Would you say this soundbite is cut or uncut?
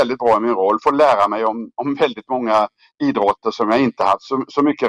uncut